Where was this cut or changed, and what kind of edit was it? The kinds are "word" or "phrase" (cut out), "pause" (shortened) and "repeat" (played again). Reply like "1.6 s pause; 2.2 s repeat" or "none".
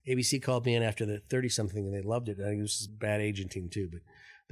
2.9 s phrase